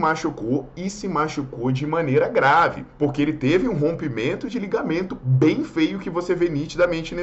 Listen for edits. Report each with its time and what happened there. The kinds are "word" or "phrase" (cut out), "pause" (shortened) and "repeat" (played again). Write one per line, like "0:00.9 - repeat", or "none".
0:02.9 - pause

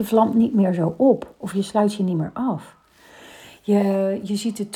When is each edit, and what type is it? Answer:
none

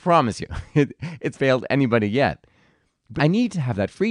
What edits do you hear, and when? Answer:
0:01.3 - word
0:03.2 - word

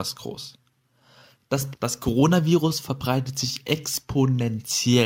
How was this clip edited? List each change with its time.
0:01.7 - word

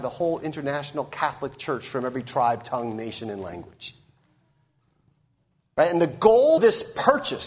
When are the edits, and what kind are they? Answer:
0:06.6 - word

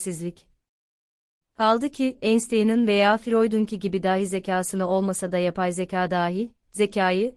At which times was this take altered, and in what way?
none

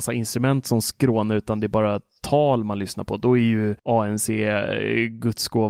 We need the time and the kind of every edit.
0:03.8 - pause

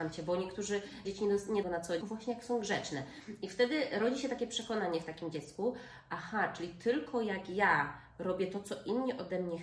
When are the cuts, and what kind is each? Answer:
0:01.0 - word
0:01.6 - phrase
0:02.0 - phrase

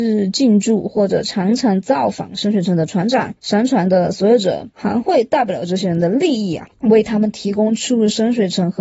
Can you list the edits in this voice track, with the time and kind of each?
0:03.4 - pause
0:04.7 - pause
0:06.7 - pause

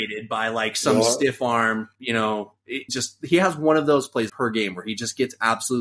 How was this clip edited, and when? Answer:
0:02.9 - word
0:04.3 - word

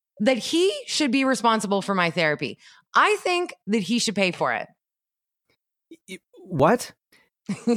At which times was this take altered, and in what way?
none

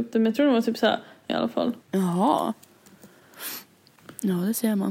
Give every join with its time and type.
0:01.3 - word
0:01.8 - pause

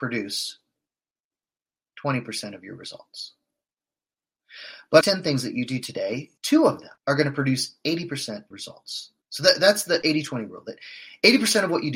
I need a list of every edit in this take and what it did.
0:05.0 - phrase
0:06.4 - pause
0:07.0 - pause
0:08.5 - phrase
0:09.2 - pause

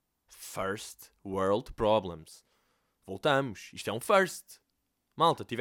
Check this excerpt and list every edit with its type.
none

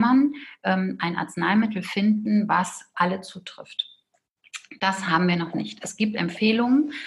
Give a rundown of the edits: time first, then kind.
0:02.9 - word

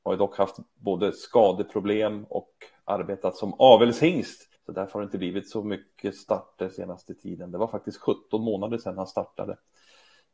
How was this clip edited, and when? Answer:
0:04.5 - pause

